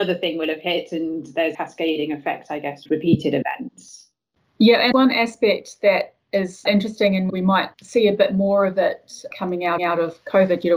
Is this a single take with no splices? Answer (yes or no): no